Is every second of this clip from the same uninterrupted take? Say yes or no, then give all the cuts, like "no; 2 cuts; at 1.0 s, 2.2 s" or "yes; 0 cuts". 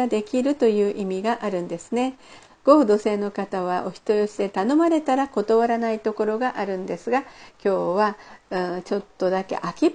yes; 0 cuts